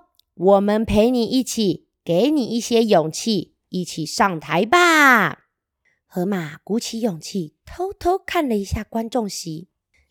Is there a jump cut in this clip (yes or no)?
no